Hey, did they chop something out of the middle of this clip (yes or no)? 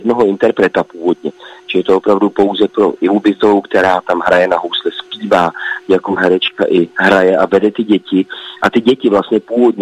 yes